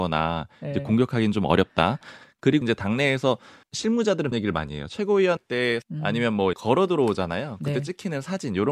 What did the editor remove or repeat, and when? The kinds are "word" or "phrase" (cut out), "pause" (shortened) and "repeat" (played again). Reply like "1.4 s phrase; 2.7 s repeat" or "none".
2.6 s word; 3.6 s word; 4.3 s word; 5.4 s word; 5.8 s word; 6.5 s word